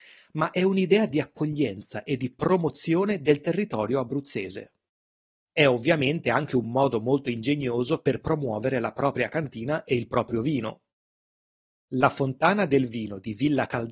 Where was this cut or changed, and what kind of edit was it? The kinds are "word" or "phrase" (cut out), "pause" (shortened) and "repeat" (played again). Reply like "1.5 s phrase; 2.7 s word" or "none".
none